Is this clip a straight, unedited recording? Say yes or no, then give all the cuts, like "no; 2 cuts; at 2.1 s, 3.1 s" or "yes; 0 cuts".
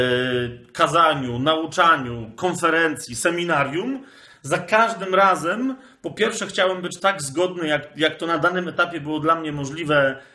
yes; 0 cuts